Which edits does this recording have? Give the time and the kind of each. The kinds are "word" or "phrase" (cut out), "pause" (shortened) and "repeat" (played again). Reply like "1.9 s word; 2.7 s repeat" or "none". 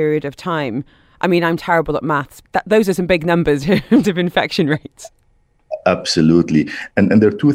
2.4 s word; 3.6 s word; 4.0 s word; 5.8 s word